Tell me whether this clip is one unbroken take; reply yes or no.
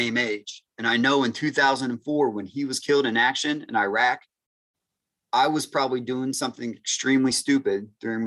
yes